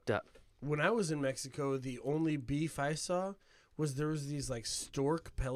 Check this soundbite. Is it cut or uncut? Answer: uncut